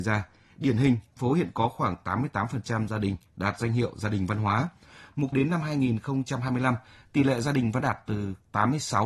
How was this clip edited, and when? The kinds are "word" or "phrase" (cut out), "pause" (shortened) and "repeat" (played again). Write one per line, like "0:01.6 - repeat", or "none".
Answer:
0:01.2 - word
0:05.3 - word
0:07.8 - word